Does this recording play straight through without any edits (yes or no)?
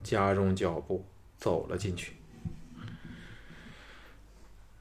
yes